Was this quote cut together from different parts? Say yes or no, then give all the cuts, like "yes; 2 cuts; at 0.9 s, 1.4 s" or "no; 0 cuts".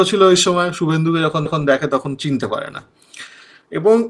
yes; 1 cut; at 1.5 s